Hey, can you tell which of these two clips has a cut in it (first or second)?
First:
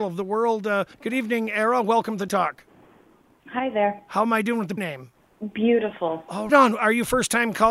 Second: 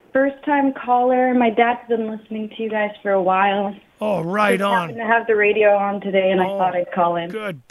first